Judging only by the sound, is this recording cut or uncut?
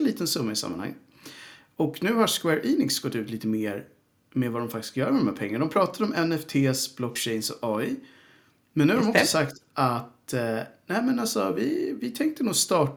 uncut